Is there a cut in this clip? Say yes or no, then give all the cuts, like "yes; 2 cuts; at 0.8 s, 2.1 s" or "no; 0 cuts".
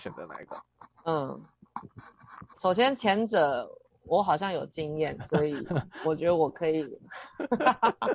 yes; 1 cut; at 2.5 s